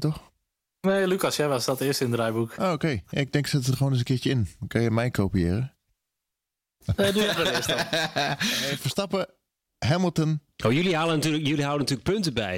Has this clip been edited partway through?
no; 0 cuts

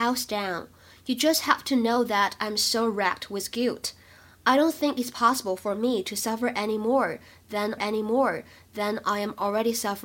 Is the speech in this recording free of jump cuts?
no; 1 cut; at 7.8 s

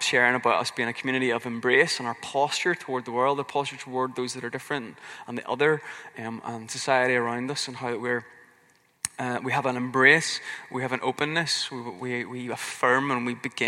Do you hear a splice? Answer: no; 0 cuts

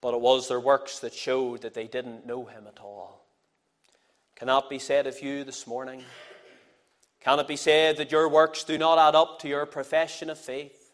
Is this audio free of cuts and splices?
yes; 0 cuts

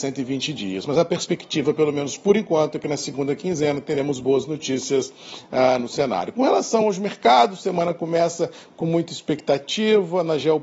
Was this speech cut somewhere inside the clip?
no; 0 cuts

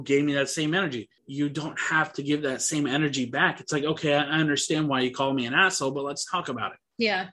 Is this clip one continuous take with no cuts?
no; 1 cut; at 1.2 s

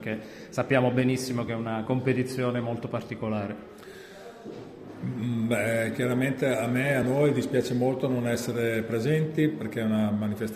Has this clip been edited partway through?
no; 0 cuts

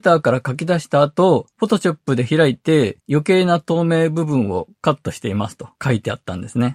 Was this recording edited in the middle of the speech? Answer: yes; 4 cuts; at 1.5 s, 3.0 s, 4.8 s, 5.7 s

